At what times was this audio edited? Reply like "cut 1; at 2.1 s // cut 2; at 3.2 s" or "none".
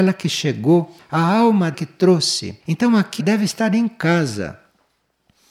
cut 1; at 1.7 s // cut 2; at 2.6 s // cut 3; at 3.2 s